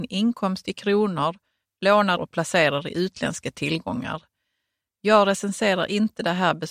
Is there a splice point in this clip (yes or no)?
yes